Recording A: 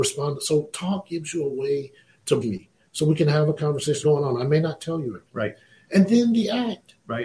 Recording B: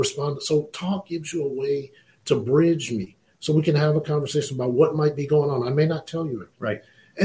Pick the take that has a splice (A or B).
A